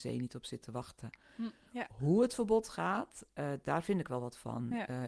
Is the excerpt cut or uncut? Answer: uncut